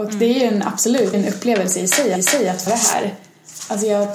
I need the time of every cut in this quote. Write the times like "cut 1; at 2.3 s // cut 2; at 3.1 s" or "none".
cut 1; at 1.1 s // cut 2; at 2.2 s // cut 3; at 2.7 s

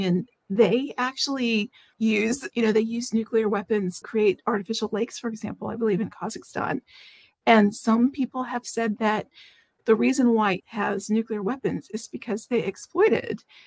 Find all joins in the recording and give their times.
cut 1; at 1.9 s // cut 2; at 2.5 s // cut 3; at 4.0 s // cut 4; at 10.6 s

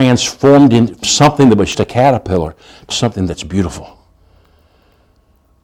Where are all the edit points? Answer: cut 1; at 1.0 s // cut 2; at 1.7 s // cut 3; at 2.9 s

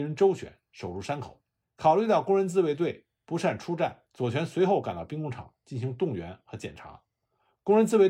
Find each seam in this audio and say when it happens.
cut 1; at 1.6 s // cut 2; at 4.1 s

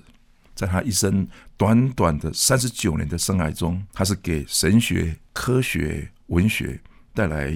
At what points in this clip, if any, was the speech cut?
cut 1; at 3.9 s // cut 2; at 5.3 s // cut 3; at 6.2 s

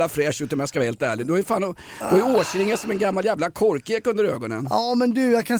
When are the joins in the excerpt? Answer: none

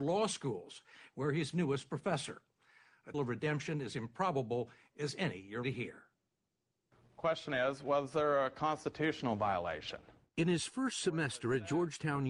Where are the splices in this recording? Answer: cut 1; at 1.5 s // cut 2; at 3.1 s // cut 3; at 5.6 s // cut 4; at 7.5 s

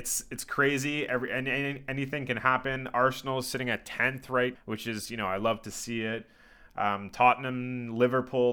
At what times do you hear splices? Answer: cut 1; at 4.6 s

